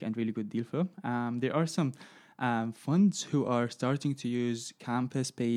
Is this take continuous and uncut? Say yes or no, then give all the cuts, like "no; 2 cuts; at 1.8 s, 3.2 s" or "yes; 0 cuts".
yes; 0 cuts